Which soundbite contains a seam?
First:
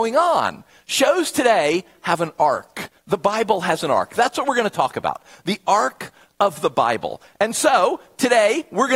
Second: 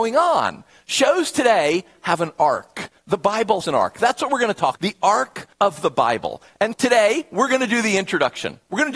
second; 4 cuts; at 3.6 s, 4.8 s, 5.5 s, 6.7 s

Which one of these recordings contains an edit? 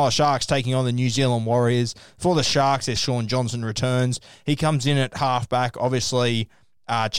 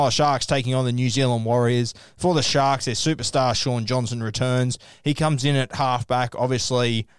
first; 1 cut; at 3.0 s

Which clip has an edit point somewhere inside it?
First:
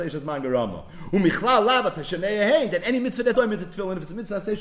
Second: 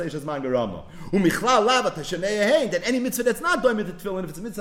first; 1 cut; at 3.3 s

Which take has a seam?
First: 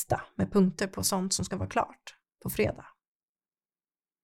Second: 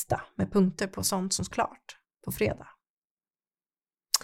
second; 1 cut; at 1.5 s

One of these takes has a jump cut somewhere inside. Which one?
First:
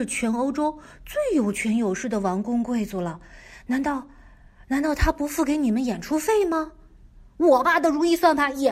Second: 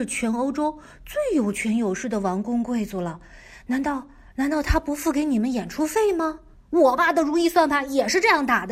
second; 2 cuts; at 4.3 s, 6.5 s

